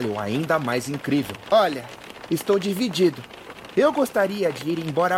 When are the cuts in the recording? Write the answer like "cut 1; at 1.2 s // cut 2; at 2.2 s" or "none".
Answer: cut 1; at 2.3 s